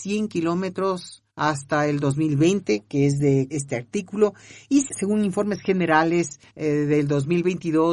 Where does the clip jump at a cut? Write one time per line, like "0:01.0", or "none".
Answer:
0:01.3
0:03.5
0:04.9
0:06.5